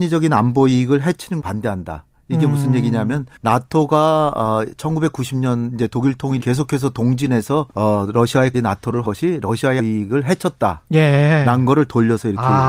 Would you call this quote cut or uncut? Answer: cut